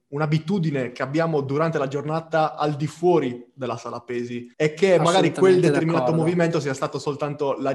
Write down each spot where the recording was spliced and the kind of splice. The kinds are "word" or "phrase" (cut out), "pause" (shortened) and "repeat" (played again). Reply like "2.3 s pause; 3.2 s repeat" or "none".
4.5 s pause